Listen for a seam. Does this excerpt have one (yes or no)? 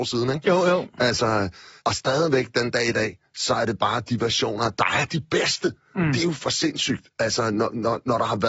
yes